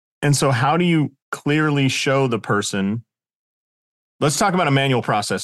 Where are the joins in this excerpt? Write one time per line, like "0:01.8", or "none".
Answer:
0:01.2